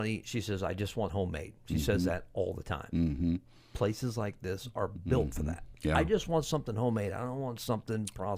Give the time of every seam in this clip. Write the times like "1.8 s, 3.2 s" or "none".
1.1 s